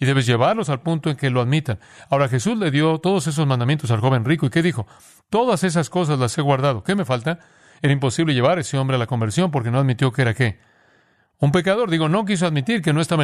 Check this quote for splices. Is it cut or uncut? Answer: uncut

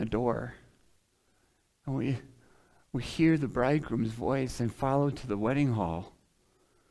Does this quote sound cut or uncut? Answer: uncut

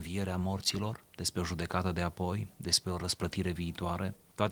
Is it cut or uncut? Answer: uncut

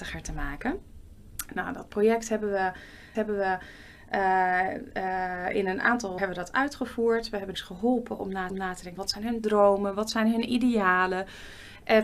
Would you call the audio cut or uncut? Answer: cut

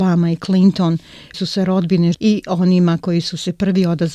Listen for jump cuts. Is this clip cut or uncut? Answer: cut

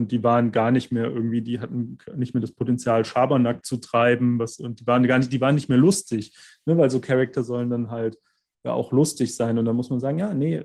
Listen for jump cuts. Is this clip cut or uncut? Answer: uncut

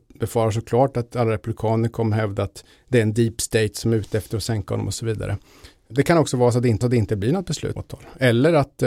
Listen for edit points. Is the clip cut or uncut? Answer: cut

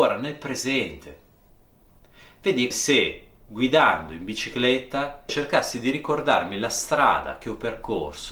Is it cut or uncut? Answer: cut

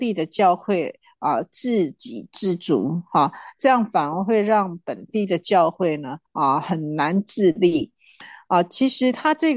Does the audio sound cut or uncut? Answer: cut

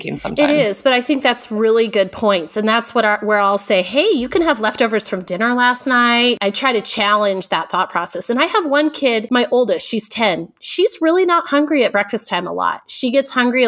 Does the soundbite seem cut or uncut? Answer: uncut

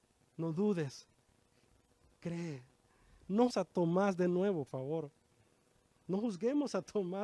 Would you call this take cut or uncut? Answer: cut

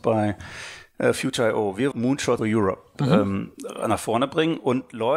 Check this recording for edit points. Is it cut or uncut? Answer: cut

